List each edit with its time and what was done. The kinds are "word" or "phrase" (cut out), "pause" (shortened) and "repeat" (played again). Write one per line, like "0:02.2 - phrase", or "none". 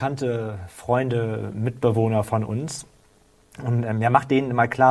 none